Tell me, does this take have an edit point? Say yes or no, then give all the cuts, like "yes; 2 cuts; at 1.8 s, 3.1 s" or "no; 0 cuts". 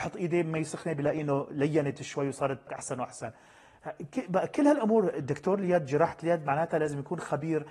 yes; 2 cuts; at 2.7 s, 5.1 s